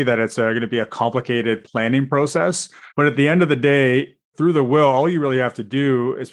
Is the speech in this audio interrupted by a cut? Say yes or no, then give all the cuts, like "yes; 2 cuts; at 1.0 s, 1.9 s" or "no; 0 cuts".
yes; 2 cuts; at 2.9 s, 4.2 s